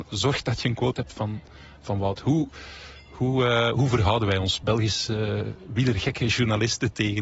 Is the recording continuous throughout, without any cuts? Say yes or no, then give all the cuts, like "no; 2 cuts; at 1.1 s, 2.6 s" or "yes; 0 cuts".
yes; 0 cuts